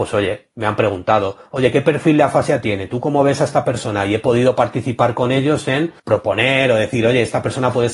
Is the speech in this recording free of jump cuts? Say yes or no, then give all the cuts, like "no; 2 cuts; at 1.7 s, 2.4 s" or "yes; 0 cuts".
no; 1 cut; at 6.0 s